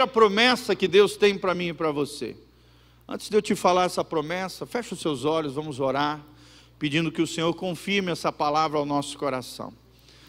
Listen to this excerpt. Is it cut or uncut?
uncut